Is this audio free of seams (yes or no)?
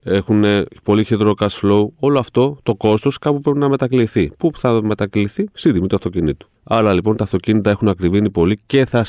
no